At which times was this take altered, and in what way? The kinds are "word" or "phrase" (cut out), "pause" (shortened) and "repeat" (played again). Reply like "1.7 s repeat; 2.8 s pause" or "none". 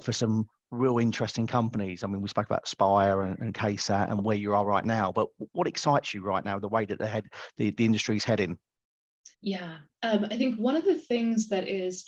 9.3 s pause